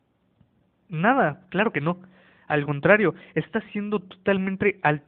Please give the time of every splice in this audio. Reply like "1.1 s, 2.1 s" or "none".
none